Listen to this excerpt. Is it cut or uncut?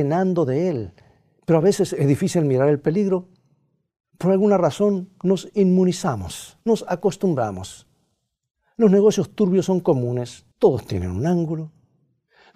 cut